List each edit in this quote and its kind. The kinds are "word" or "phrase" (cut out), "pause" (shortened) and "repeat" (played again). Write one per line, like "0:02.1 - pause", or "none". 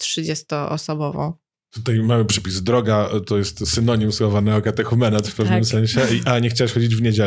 none

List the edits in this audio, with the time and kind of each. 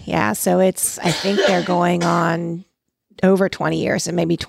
none

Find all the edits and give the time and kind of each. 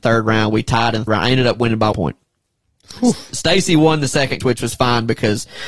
0:01.1 - word
0:01.9 - word
0:04.4 - word

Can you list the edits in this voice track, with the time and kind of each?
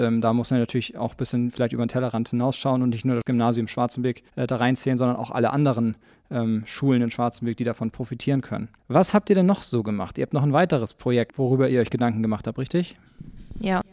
0:04.3 - pause
0:08.8 - pause

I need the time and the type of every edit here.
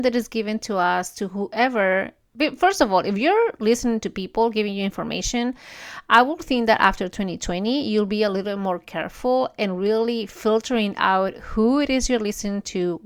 none

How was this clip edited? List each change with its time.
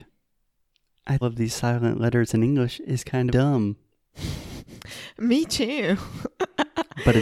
0:01.2 - phrase
0:03.3 - word

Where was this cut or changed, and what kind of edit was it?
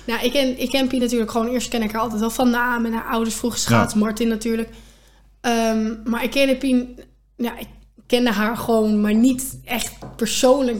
none

